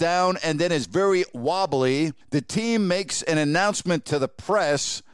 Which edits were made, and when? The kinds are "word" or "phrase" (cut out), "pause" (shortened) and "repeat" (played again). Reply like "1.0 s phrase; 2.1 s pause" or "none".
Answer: 2.2 s pause